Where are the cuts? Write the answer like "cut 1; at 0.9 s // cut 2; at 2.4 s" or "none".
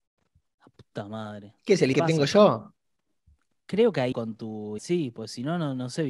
cut 1; at 1.9 s // cut 2; at 4.1 s // cut 3; at 4.8 s